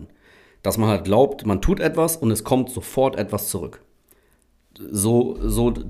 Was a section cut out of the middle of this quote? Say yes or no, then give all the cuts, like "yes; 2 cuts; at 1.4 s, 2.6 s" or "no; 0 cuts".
no; 0 cuts